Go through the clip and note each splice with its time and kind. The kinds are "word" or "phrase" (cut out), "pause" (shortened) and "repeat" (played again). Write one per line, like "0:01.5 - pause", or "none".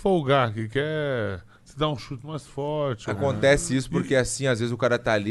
none